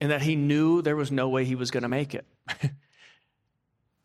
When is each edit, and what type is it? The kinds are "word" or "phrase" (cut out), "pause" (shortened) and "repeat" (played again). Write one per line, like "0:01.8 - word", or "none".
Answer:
none